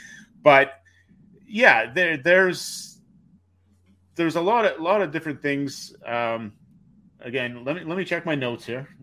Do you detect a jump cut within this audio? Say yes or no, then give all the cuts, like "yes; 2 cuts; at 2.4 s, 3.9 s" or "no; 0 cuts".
no; 0 cuts